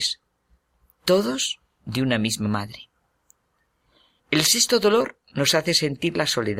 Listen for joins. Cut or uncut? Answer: uncut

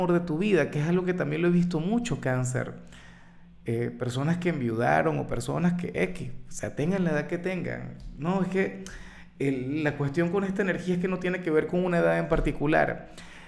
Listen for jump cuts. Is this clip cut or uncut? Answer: uncut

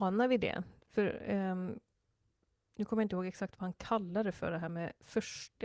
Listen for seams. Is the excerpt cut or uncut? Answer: uncut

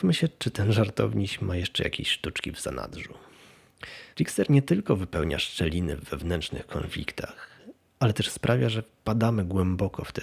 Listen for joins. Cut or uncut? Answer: cut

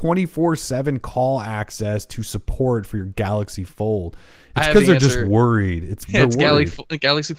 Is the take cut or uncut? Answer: uncut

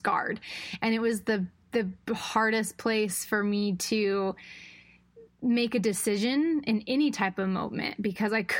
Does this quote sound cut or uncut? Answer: uncut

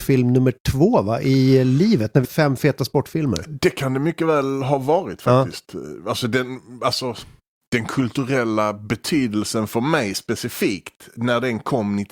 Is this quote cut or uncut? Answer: cut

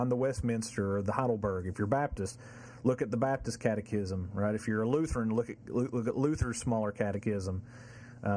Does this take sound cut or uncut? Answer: uncut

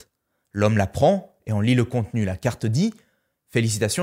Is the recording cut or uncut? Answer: uncut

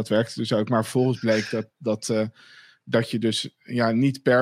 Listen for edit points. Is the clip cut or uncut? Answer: uncut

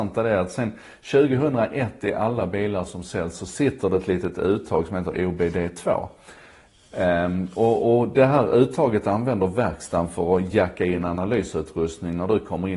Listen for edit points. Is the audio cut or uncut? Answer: uncut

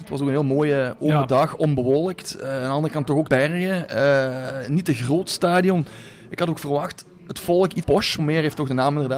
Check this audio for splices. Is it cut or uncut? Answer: cut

